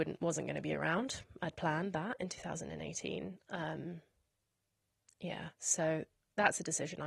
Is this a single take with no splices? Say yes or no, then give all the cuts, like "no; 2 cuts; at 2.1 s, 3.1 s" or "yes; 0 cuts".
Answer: yes; 0 cuts